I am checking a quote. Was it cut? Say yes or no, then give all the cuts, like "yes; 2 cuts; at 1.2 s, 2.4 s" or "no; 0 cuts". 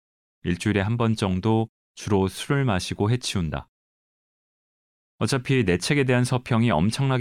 no; 0 cuts